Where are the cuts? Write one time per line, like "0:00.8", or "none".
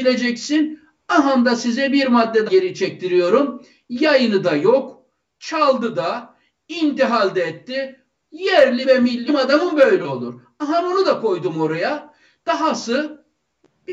0:02.5
0:08.8
0:09.3